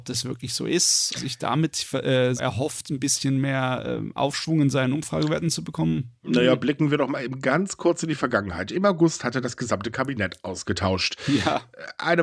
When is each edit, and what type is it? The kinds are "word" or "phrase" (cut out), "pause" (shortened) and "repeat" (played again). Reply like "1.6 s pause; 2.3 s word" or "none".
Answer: 1.1 s phrase; 2.4 s word